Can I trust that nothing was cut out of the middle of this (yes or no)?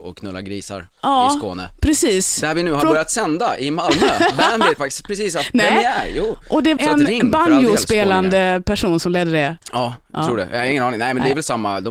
no